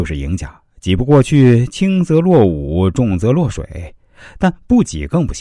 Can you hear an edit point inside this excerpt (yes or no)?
no